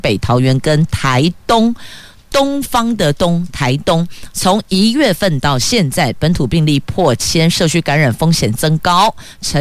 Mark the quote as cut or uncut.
uncut